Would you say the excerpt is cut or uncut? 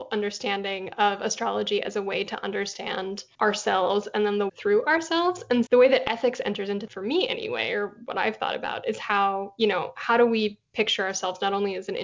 cut